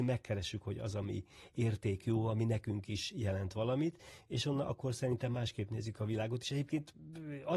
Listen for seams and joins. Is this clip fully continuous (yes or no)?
yes